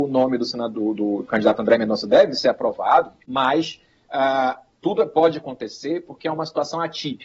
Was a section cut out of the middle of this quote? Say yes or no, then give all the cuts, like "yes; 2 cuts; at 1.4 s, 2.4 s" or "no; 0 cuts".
yes; 1 cut; at 3.2 s